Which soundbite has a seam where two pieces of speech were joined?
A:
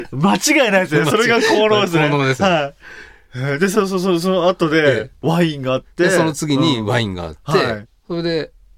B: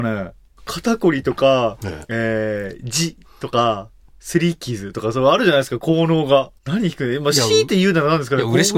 B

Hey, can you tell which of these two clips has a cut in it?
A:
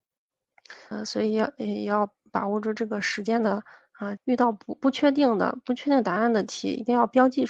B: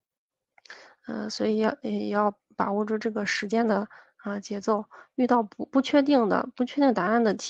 A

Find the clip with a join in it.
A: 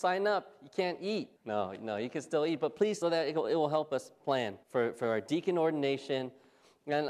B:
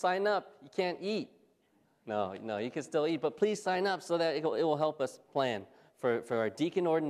A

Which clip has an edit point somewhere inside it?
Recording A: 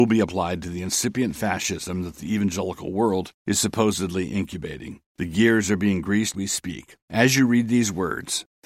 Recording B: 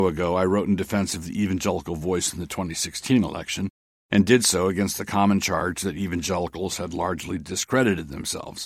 A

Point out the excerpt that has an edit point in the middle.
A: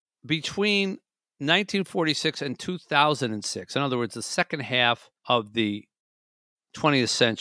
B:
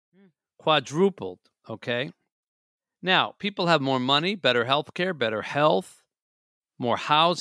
A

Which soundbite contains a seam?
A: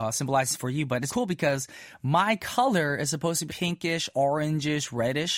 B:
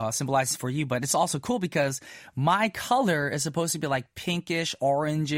A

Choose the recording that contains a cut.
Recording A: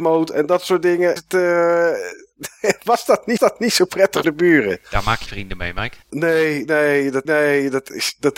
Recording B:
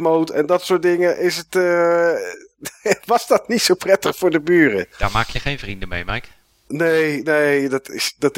A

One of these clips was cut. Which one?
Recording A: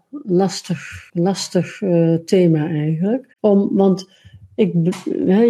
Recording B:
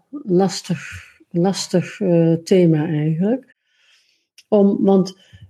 A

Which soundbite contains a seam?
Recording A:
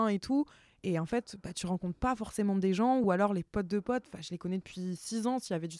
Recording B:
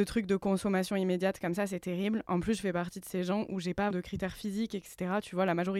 B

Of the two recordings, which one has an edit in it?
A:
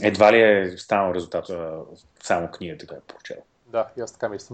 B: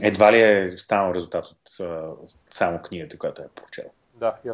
A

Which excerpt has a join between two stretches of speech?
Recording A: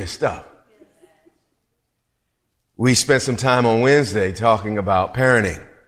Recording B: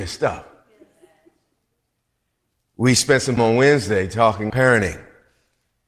B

